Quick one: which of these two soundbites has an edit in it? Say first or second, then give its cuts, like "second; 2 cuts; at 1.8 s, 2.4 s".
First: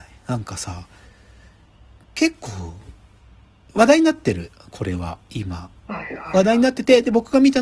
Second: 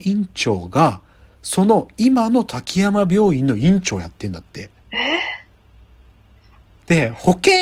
second; 1 cut; at 4.8 s